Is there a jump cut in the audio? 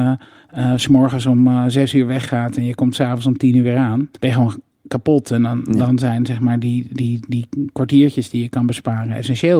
yes; 1 cut; at 4.2 s

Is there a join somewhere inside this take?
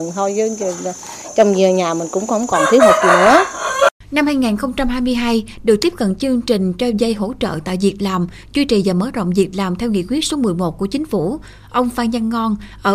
yes; 1 cut; at 4.0 s

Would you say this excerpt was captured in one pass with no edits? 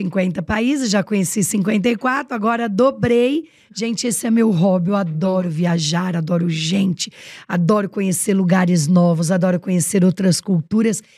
yes; 0 cuts

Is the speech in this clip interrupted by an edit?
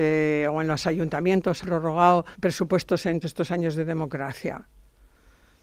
yes; 3 cuts; at 1.6 s, 2.3 s, 3.2 s

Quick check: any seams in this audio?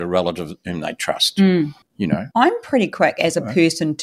yes; 2 cuts; at 1.8 s, 2.3 s

